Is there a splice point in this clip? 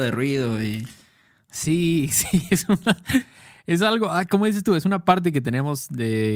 no; 0 cuts

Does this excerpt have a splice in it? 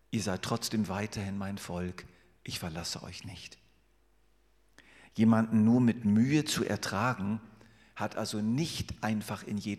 no; 0 cuts

